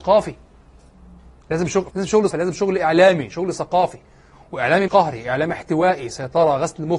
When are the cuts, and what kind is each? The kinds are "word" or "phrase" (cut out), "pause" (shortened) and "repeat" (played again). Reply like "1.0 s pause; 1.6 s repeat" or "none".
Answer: 1.9 s word; 2.3 s word; 4.9 s word